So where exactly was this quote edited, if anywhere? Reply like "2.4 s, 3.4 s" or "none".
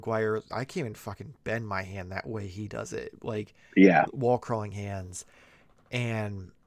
none